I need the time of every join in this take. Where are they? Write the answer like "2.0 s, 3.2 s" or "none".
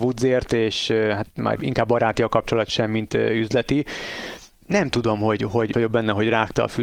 1.6 s, 4.5 s, 5.7 s